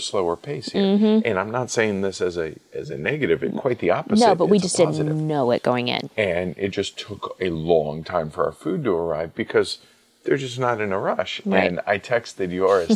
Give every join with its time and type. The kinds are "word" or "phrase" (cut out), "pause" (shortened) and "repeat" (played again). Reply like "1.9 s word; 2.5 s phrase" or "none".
none